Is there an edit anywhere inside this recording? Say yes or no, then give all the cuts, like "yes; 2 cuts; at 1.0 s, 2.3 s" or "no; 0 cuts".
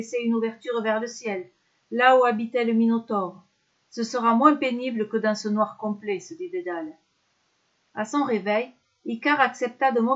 no; 0 cuts